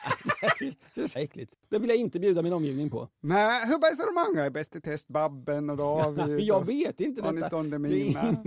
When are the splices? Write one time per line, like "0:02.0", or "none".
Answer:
0:01.2